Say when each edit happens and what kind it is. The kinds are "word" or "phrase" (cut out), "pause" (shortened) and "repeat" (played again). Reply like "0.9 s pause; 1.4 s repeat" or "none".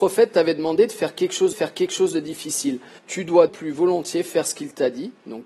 1.5 s repeat; 3.0 s phrase; 3.5 s word